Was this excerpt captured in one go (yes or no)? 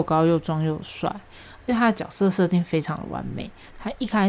yes